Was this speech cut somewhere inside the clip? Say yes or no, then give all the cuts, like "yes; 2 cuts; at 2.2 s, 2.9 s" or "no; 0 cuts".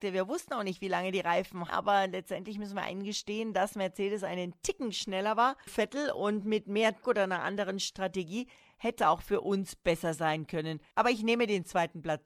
yes; 4 cuts; at 1.7 s, 5.7 s, 7.0 s, 9.0 s